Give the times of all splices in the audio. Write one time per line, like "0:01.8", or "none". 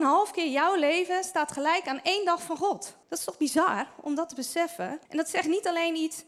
0:03.0
0:05.1